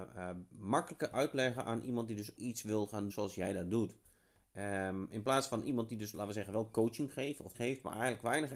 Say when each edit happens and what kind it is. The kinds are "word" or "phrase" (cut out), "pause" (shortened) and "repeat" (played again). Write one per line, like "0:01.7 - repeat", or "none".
0:02.4 - word
0:03.1 - word
0:07.5 - word